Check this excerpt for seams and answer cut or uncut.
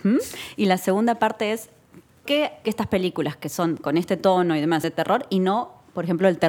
cut